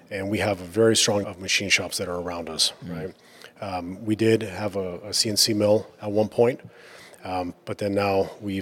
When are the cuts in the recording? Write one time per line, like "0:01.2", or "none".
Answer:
0:01.2